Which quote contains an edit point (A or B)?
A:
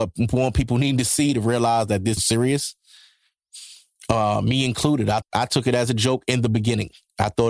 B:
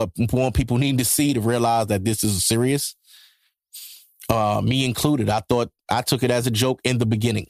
A